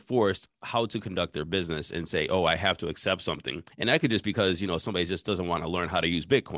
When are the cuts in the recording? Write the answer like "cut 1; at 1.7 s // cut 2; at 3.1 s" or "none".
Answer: cut 1; at 3.7 s

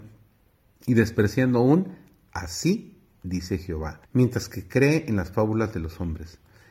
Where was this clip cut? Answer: cut 1; at 4.0 s

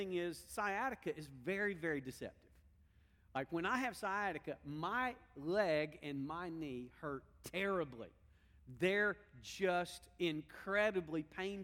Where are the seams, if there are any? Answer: none

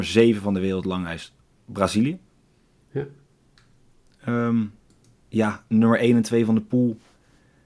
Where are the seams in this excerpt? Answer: none

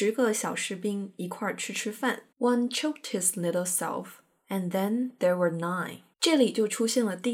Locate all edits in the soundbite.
cut 1; at 2.3 s // cut 2; at 6.1 s

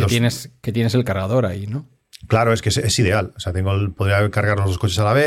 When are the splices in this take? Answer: none

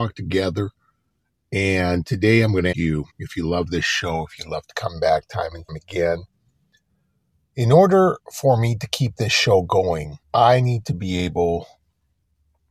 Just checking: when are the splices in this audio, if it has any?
cut 1; at 2.7 s // cut 2; at 3.1 s // cut 3; at 5.7 s // cut 4; at 10.2 s

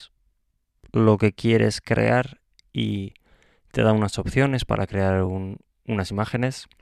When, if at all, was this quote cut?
none

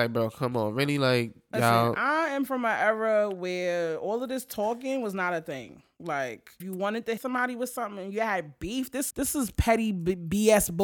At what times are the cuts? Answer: cut 1; at 6.6 s // cut 2; at 7.2 s // cut 3; at 9.1 s

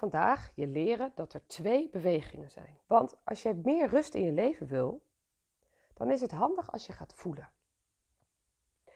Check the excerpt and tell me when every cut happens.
cut 1; at 2.8 s

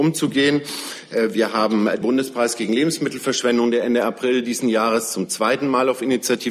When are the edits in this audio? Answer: cut 1; at 2.0 s

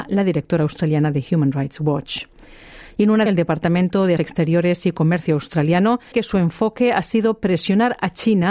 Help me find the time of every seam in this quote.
cut 1; at 3.3 s // cut 2; at 4.2 s // cut 3; at 6.1 s

